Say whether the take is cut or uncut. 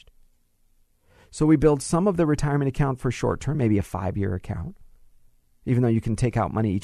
uncut